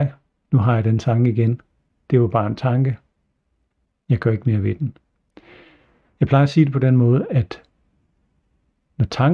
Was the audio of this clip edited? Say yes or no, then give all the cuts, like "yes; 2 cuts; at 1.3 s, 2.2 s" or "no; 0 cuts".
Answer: no; 0 cuts